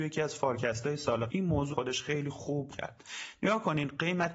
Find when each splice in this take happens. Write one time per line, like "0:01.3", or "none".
0:01.3
0:01.7
0:02.7